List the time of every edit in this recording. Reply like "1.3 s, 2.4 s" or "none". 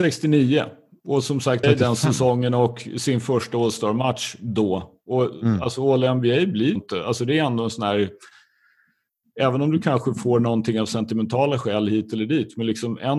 1.6 s, 6.8 s